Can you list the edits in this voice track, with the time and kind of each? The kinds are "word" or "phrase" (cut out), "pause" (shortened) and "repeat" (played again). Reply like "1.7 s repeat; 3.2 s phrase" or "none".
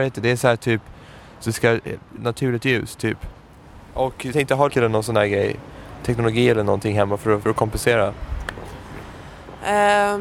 2.2 s word; 4.3 s phrase; 4.7 s phrase; 7.4 s word